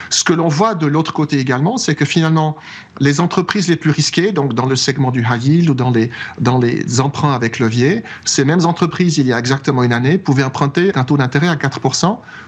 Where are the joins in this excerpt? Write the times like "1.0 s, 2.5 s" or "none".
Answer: 10.9 s

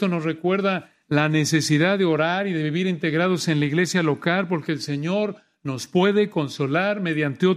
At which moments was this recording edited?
none

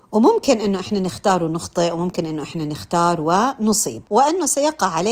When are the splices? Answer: 4.1 s

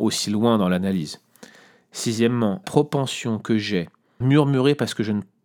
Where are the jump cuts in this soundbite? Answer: 2.6 s, 4.2 s

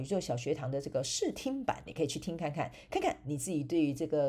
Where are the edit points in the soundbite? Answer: 1.9 s

